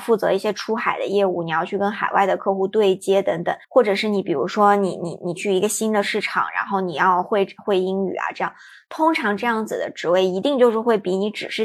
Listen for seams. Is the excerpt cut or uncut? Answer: cut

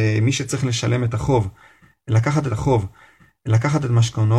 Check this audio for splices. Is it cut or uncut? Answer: cut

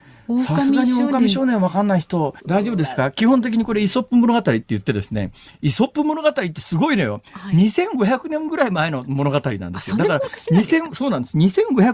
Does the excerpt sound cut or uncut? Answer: cut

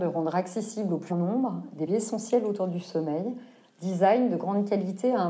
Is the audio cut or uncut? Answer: cut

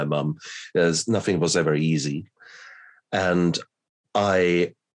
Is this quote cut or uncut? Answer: uncut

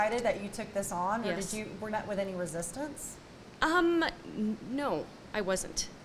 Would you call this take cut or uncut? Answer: cut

